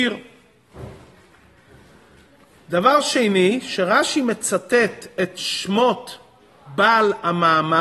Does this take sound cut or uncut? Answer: uncut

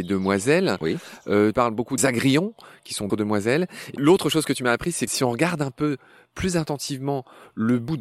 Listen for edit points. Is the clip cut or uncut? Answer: cut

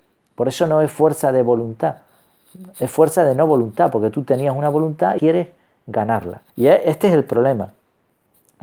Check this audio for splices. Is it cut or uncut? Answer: cut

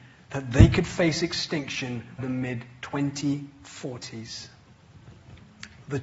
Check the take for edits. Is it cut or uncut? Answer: cut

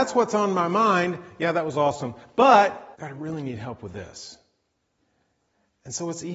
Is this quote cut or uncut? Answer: cut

